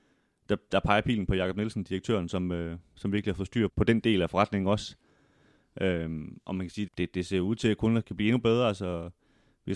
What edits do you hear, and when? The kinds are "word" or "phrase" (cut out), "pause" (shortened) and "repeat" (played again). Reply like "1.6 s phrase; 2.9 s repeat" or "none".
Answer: 3.7 s word; 6.9 s word; 8.0 s word

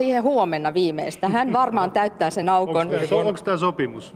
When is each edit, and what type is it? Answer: none

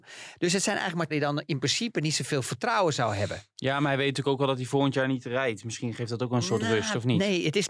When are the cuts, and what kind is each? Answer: 1.1 s phrase

